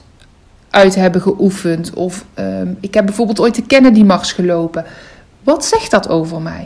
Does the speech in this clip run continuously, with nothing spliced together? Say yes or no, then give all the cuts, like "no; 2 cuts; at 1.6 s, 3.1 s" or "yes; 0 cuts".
yes; 0 cuts